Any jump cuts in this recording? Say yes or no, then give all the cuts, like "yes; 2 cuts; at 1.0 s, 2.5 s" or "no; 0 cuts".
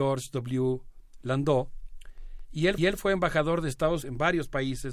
yes; 2 cuts; at 2.8 s, 4.0 s